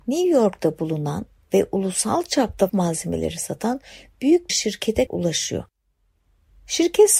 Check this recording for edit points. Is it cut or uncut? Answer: cut